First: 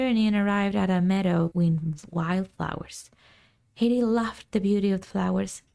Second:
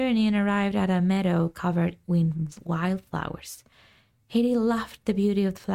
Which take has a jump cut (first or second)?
first